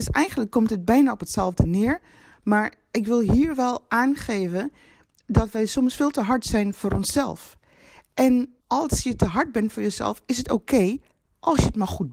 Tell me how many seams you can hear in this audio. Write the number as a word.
one